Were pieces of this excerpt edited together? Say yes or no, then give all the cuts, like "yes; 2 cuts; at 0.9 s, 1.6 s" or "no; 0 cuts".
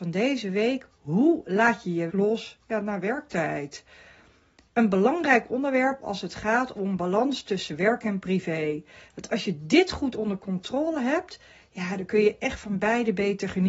yes; 1 cut; at 2.1 s